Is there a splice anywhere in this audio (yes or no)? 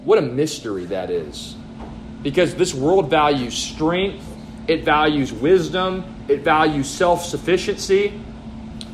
no